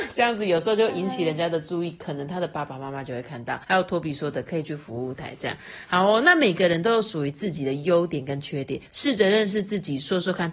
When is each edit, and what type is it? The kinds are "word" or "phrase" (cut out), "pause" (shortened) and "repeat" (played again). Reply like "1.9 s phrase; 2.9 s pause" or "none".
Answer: 3.6 s pause; 8.9 s pause